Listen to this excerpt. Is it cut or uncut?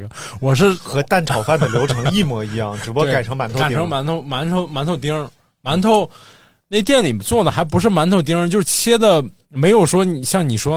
uncut